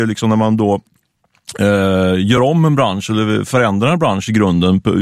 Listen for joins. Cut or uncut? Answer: uncut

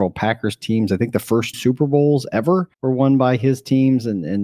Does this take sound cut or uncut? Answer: cut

